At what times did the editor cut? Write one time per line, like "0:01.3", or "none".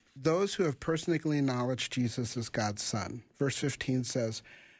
none